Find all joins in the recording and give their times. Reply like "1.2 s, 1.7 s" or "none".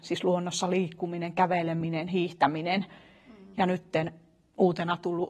none